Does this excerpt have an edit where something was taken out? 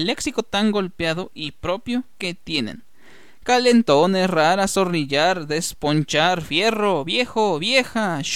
no; 0 cuts

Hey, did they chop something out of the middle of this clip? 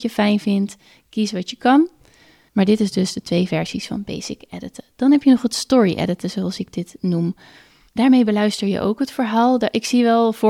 no; 0 cuts

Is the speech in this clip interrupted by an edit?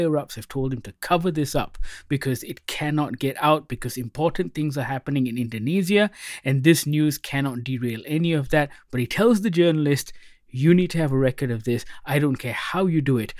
no; 0 cuts

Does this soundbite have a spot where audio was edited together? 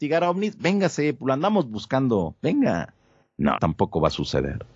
yes; 1 cut; at 3.6 s

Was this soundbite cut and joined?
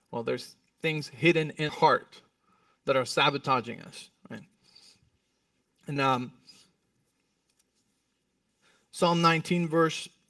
yes; 2 cuts; at 1.7 s, 6.0 s

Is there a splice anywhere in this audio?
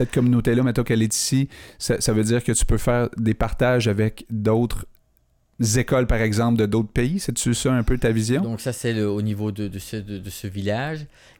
no; 0 cuts

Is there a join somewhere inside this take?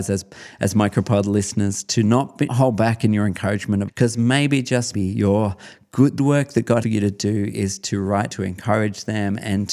yes; 6 cuts; at 2.5 s, 3.9 s, 4.9 s, 6.2 s, 6.8 s, 8.3 s

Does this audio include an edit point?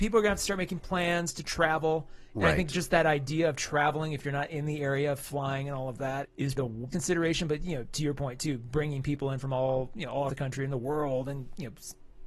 yes; 4 cuts; at 6.2 s, 6.6 s, 6.9 s, 10.3 s

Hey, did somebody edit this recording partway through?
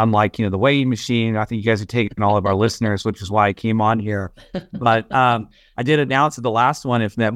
no; 0 cuts

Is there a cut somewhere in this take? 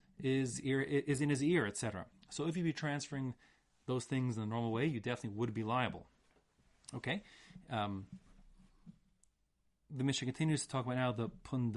no; 0 cuts

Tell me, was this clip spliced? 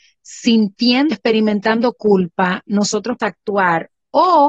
yes; 2 cuts; at 1.1 s, 3.2 s

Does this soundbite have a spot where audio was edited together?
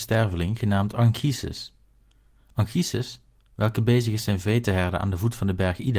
no; 0 cuts

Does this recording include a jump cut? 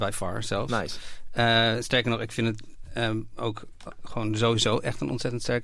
no; 0 cuts

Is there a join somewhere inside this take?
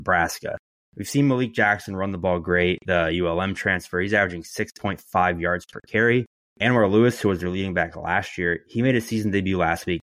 no; 0 cuts

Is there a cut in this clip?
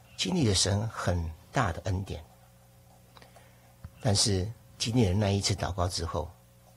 yes; 1 cut; at 4.6 s

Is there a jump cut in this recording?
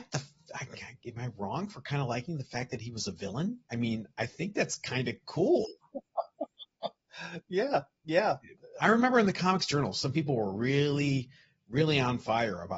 yes; 1 cut; at 3.6 s

